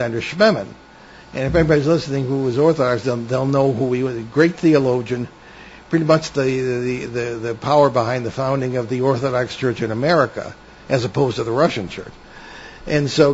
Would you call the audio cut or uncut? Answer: uncut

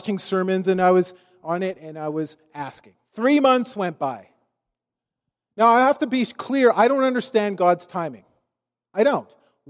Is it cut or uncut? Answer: cut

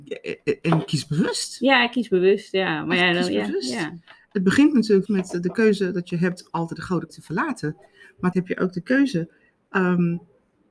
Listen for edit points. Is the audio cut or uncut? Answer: cut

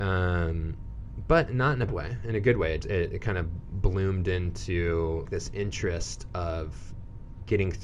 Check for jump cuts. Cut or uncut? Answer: cut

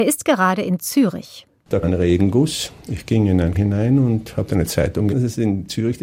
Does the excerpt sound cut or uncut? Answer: cut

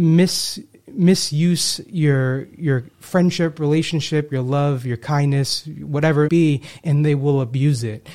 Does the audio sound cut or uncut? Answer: cut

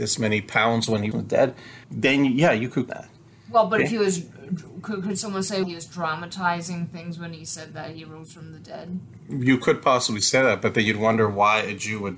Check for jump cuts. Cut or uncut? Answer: cut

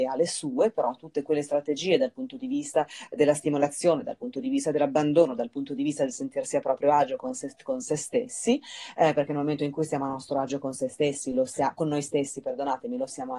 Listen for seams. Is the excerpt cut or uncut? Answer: uncut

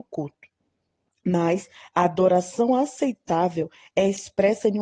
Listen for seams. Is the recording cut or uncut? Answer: uncut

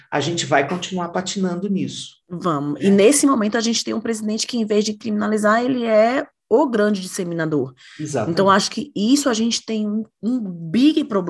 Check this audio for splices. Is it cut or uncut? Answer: cut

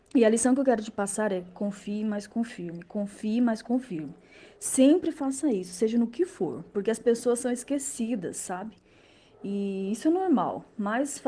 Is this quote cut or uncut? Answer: uncut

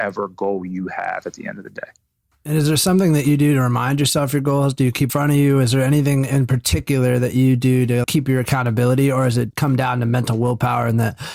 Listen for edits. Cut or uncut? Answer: cut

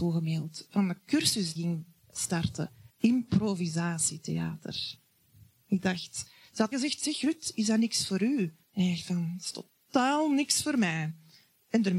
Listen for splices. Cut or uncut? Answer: cut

